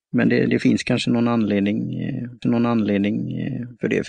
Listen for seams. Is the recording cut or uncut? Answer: cut